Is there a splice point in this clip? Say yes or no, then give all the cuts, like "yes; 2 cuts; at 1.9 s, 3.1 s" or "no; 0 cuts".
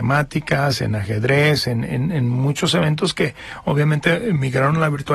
no; 0 cuts